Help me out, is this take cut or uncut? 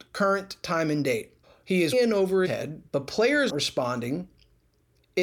cut